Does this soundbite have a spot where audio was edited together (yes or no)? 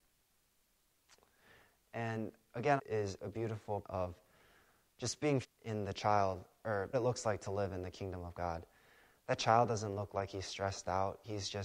yes